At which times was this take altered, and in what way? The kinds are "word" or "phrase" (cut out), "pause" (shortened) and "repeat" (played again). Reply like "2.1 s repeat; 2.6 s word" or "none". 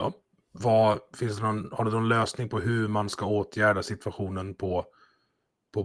none